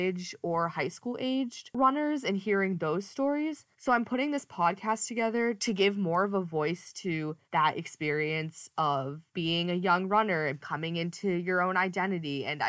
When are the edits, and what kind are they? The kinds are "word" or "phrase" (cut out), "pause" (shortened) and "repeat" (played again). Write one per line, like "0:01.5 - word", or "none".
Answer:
0:03.7 - pause
0:07.4 - pause
0:09.3 - pause